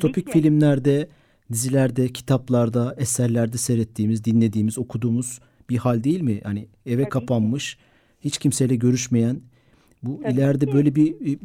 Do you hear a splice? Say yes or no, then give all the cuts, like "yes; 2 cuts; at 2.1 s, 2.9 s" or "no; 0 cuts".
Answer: no; 0 cuts